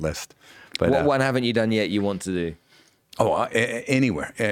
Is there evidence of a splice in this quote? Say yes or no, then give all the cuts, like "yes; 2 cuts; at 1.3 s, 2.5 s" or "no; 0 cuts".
no; 0 cuts